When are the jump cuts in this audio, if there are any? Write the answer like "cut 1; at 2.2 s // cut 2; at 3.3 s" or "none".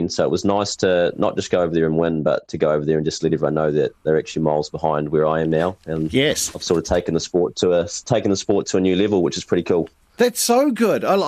none